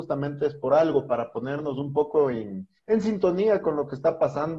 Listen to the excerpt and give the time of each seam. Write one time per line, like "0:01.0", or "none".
0:02.8